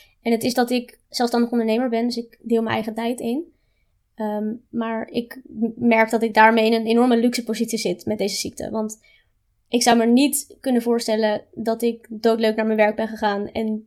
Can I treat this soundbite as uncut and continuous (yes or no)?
yes